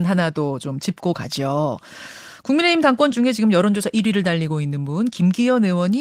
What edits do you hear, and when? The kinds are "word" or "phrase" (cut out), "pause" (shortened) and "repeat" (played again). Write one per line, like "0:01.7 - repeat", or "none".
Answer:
0:03.1 - word